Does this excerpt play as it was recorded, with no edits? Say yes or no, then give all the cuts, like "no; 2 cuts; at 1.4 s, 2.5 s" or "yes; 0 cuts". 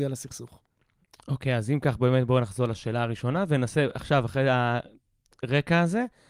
yes; 0 cuts